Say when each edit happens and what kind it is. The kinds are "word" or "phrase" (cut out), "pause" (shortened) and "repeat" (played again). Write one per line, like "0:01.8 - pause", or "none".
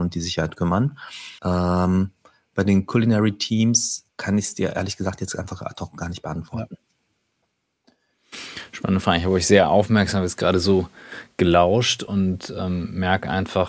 0:01.4 - pause
0:04.1 - pause